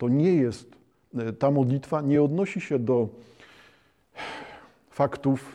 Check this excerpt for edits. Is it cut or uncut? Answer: uncut